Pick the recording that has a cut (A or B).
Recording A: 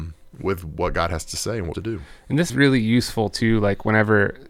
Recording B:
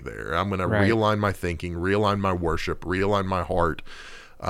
A